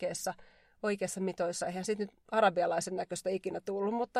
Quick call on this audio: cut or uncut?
uncut